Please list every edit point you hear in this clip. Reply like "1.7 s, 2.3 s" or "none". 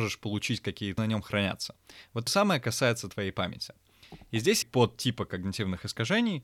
1.0 s, 2.3 s, 4.6 s